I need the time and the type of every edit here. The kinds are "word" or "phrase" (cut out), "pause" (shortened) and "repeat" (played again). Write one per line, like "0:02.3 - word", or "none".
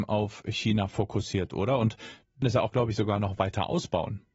0:02.4 - word